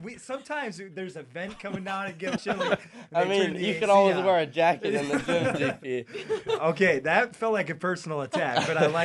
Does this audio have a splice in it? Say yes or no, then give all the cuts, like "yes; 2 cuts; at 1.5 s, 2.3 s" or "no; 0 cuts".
yes; 1 cut; at 2.4 s